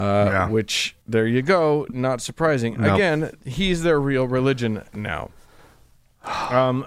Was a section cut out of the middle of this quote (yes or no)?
yes